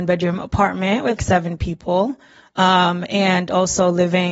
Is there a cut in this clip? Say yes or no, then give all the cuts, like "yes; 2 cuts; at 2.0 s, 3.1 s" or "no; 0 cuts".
yes; 1 cut; at 1.2 s